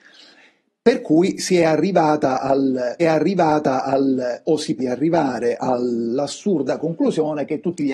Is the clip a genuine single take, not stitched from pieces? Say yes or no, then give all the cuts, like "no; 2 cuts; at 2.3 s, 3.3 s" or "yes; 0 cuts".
no; 2 cuts; at 3.0 s, 4.8 s